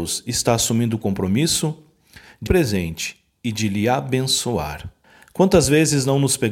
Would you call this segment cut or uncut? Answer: cut